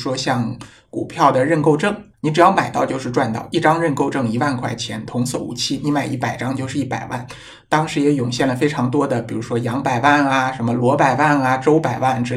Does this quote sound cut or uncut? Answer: cut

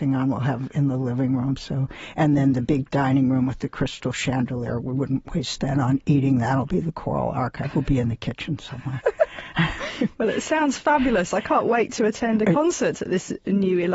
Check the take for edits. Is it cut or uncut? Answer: uncut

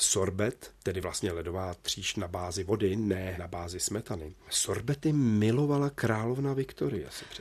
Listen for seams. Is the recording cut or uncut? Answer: uncut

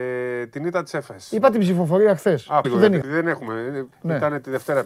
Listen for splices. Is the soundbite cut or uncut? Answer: cut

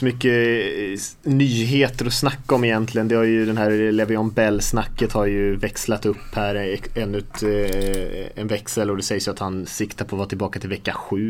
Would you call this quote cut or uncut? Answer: uncut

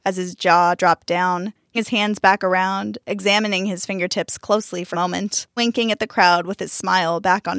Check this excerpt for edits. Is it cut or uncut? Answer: cut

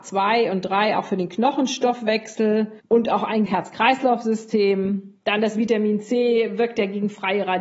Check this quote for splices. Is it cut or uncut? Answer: cut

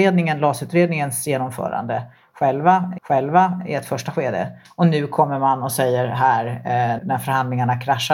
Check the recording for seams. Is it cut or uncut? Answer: cut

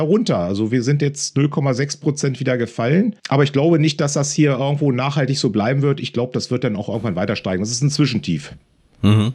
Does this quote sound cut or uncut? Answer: cut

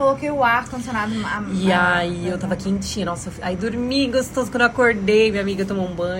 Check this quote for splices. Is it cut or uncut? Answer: uncut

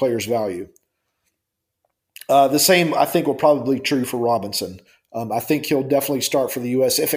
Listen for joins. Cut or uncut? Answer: uncut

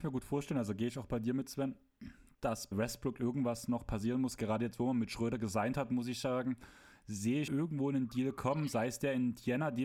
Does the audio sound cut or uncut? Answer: cut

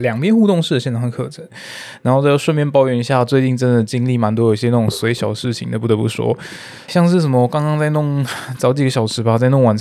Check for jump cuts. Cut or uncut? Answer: cut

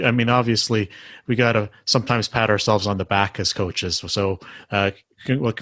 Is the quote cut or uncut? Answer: uncut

